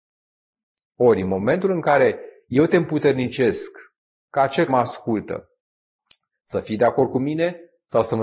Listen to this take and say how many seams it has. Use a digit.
1